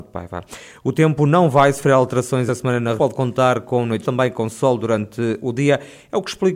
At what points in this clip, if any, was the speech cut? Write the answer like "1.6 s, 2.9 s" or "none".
2.5 s, 3.0 s, 4.0 s

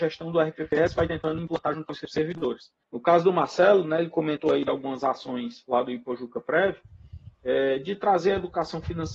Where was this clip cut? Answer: 2.8 s

